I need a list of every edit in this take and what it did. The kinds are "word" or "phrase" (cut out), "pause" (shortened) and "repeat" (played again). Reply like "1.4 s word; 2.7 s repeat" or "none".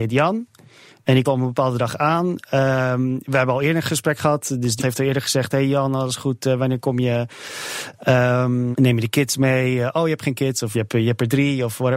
1.2 s word; 4.8 s word; 8.7 s word; 10.7 s word